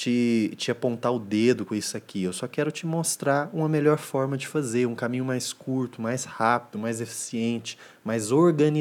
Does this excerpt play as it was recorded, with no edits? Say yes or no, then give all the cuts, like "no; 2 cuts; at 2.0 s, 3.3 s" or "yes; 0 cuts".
yes; 0 cuts